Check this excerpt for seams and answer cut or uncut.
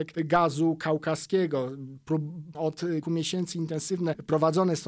cut